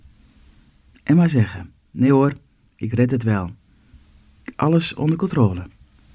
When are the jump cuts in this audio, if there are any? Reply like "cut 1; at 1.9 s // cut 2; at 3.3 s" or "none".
none

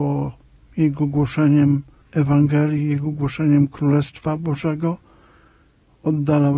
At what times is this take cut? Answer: none

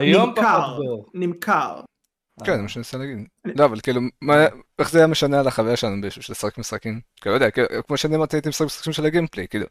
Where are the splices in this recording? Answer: none

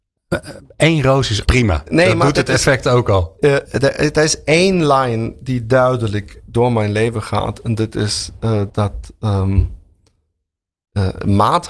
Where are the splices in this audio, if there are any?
cut 1; at 1.5 s // cut 2; at 3.6 s // cut 3; at 8.7 s

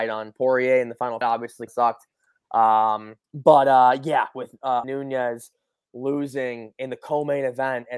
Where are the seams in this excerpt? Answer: cut 1; at 1.2 s // cut 2; at 1.7 s // cut 3; at 3.2 s // cut 4; at 4.8 s

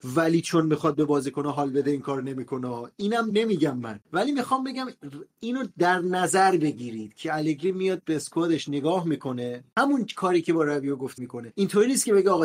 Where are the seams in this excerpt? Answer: cut 1; at 3.3 s // cut 2; at 11.2 s

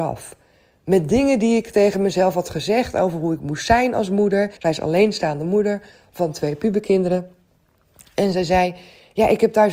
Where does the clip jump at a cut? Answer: cut 1; at 4.6 s

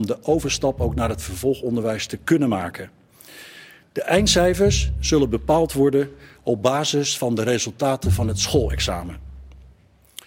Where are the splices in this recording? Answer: none

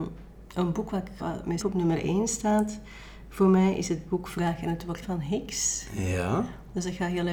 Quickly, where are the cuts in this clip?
cut 1; at 1.2 s // cut 2; at 1.6 s // cut 3; at 5.0 s

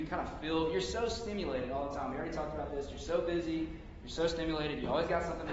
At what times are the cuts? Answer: none

